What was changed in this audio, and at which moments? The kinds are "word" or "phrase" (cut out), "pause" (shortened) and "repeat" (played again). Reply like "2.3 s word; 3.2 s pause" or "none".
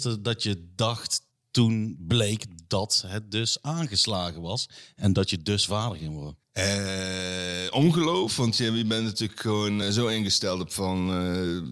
1.3 s pause; 6.4 s pause; 9.8 s word